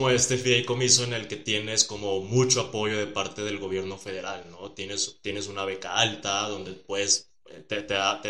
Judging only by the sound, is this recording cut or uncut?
uncut